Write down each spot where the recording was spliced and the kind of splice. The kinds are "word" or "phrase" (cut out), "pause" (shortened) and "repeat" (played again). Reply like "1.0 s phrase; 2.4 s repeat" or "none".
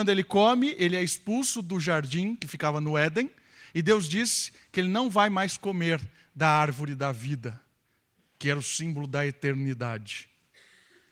none